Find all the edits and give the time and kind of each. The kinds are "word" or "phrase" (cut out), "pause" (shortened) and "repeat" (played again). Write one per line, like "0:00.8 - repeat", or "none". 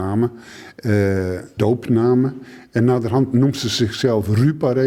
0:01.6 - phrase
0:03.3 - word

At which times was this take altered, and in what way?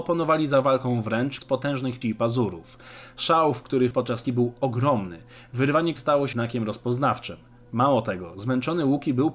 0:01.4 - word
0:02.0 - word
0:03.9 - word
0:04.2 - word
0:06.0 - word
0:06.3 - word

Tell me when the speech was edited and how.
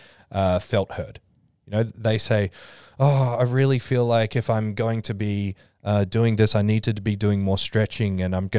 none

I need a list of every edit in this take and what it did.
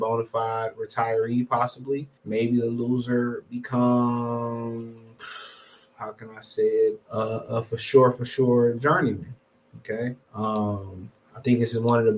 0:02.2 - pause
0:07.0 - pause
0:10.2 - pause

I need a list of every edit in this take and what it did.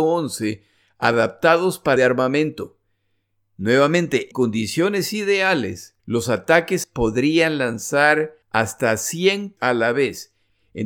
0:02.0 - phrase
0:04.3 - word
0:06.0 - pause
0:06.8 - word
0:08.4 - pause
0:09.6 - word

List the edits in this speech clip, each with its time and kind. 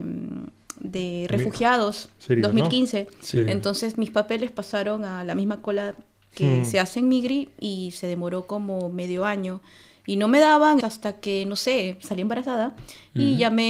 0:10.8 - word

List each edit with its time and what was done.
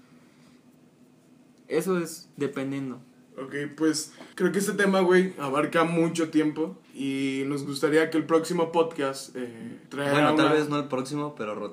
0:02.3 - pause
0:04.3 - pause
0:06.8 - pause
0:09.9 - pause

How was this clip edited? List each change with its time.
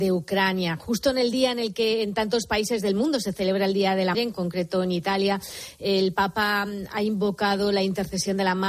0:04.1 - word

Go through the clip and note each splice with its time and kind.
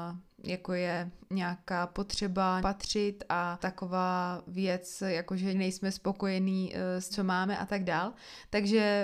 0:01.2 - pause
0:02.6 - word
0:03.6 - word
0:05.5 - word
0:07.1 - word

